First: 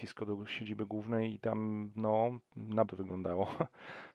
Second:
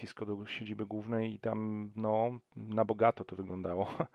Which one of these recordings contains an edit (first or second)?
first